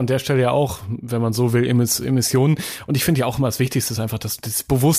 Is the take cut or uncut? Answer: uncut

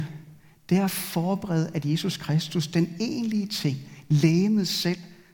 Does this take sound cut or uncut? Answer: uncut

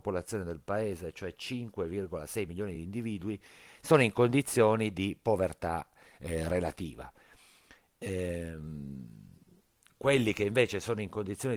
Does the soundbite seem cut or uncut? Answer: uncut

